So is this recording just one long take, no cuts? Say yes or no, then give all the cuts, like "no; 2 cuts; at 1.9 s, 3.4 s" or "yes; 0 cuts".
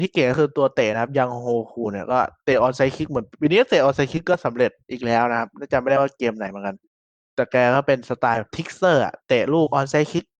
no; 3 cuts; at 4.8 s, 7.2 s, 9.2 s